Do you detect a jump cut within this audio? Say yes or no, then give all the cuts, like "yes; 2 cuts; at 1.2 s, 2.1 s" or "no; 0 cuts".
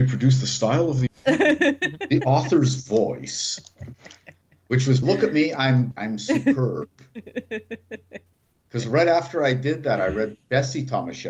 yes; 3 cuts; at 1.1 s, 5.0 s, 5.9 s